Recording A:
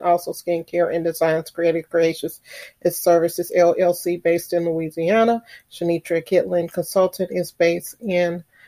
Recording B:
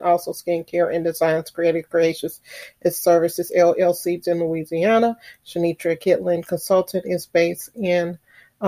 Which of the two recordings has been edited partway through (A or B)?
B